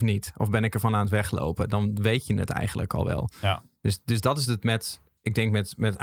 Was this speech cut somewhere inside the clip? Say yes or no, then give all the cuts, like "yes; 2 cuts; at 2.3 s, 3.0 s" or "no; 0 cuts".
no; 0 cuts